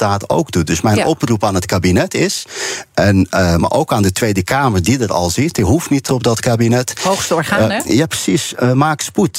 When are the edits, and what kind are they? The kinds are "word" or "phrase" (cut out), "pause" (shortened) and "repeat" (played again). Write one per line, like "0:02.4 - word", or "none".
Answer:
0:06.1 - word